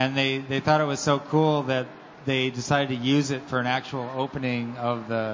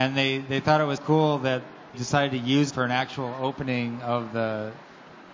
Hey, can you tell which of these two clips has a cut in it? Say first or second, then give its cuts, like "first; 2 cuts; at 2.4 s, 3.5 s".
second; 3 cuts; at 1.0 s, 1.9 s, 2.7 s